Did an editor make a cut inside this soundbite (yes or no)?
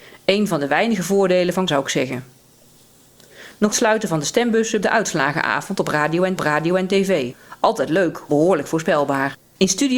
yes